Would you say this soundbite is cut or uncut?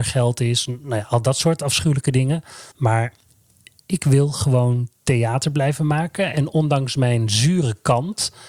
cut